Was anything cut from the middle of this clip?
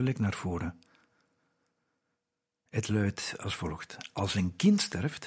no; 0 cuts

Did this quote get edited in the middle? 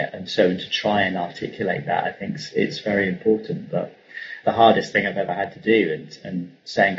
no; 0 cuts

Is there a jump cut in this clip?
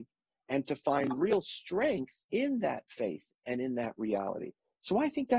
yes; 1 cut; at 2.2 s

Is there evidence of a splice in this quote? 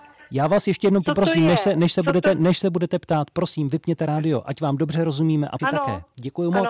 yes; 1 cut; at 5.6 s

